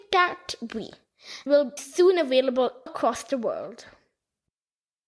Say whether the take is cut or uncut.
cut